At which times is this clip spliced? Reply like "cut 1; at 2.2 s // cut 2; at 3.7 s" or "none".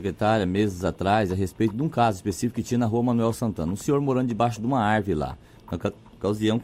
none

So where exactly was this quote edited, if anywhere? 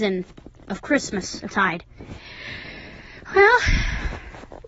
cut 1; at 1.5 s

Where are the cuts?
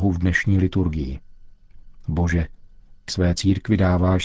cut 1; at 3.1 s

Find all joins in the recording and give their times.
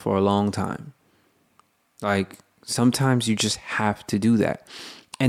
none

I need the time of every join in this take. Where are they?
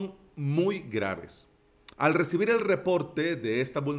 cut 1; at 1.9 s

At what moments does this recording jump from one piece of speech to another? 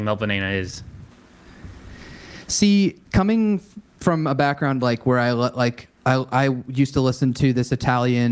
cut 1; at 3.1 s // cut 2; at 6.0 s

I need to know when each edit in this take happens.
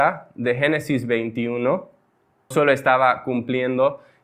cut 1; at 2.5 s

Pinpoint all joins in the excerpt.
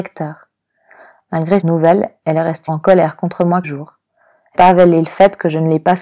cut 1; at 1.6 s // cut 2; at 2.7 s // cut 3; at 3.6 s // cut 4; at 4.5 s

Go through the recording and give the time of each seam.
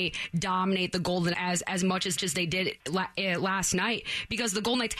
cut 1; at 1.3 s // cut 2; at 2.2 s // cut 3; at 2.8 s

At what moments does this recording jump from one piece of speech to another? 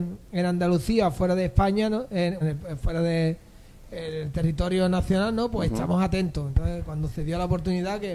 cut 1; at 2.4 s

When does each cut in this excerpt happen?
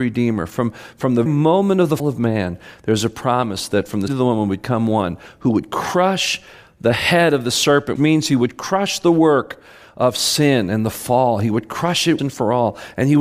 cut 1; at 1.3 s // cut 2; at 2.0 s // cut 3; at 4.1 s // cut 4; at 8.0 s // cut 5; at 12.2 s

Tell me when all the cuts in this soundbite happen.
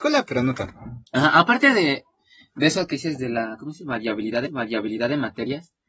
cut 1; at 1.1 s // cut 2; at 4.4 s

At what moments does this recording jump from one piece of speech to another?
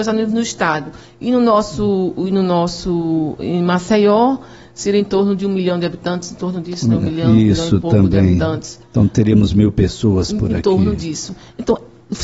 none

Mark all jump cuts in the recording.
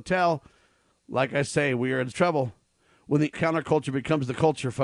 cut 1; at 2.1 s // cut 2; at 3.3 s

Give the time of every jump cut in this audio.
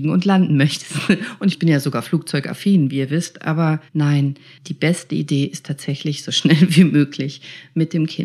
cut 1; at 3.9 s

